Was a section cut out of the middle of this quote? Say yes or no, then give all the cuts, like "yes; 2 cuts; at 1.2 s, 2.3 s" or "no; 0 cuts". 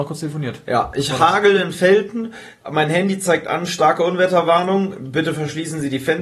no; 0 cuts